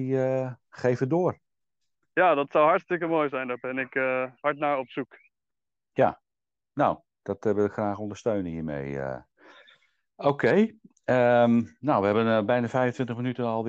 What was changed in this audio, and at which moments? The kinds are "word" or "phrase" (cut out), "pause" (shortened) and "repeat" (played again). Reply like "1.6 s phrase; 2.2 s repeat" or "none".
none